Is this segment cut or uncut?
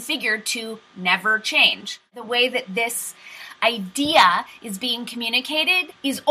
uncut